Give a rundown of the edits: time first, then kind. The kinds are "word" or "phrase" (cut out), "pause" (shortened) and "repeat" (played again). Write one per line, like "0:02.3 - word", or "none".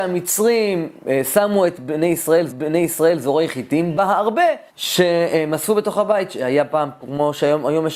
0:02.5 - repeat
0:04.7 - pause